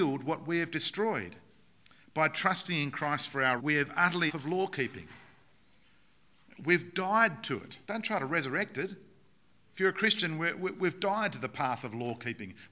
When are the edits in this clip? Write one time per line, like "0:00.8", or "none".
0:03.6
0:04.3
0:07.8